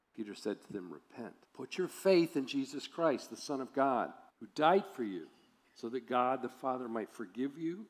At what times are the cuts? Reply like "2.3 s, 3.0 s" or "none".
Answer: 1.4 s, 4.3 s